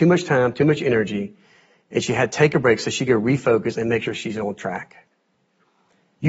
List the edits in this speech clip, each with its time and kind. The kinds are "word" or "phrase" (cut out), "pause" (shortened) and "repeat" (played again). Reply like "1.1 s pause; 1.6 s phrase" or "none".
none